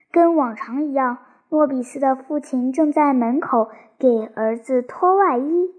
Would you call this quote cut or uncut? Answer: uncut